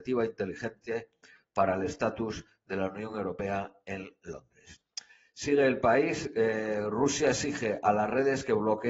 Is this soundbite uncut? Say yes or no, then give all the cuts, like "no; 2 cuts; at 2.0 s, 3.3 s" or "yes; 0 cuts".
yes; 0 cuts